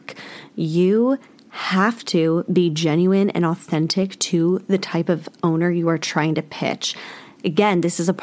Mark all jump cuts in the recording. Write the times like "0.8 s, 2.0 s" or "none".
none